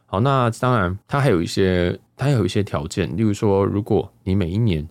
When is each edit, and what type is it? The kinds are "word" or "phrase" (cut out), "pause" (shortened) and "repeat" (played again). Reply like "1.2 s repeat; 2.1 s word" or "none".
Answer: 1.0 s pause; 2.1 s pause